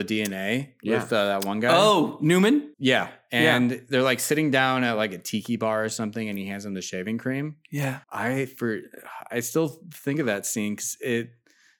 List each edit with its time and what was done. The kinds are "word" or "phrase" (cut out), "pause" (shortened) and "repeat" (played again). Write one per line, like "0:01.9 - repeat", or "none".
0:02.7 - pause
0:08.0 - pause